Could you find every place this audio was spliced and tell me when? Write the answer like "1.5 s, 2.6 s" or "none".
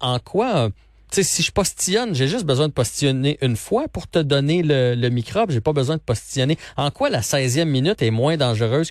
none